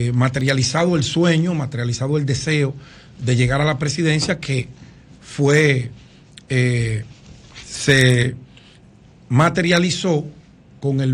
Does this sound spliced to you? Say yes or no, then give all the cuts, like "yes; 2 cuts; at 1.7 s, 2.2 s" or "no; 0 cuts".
no; 0 cuts